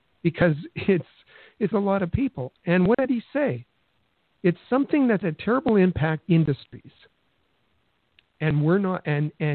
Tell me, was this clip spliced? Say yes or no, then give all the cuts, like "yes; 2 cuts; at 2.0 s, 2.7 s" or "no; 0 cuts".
yes; 3 cuts; at 1.7 s, 5.2 s, 6.2 s